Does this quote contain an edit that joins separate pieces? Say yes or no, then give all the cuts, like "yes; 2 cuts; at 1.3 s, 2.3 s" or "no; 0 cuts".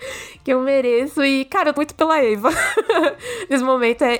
yes; 1 cut; at 1.8 s